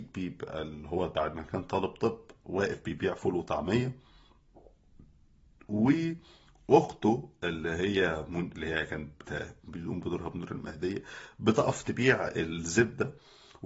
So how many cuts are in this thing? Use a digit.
0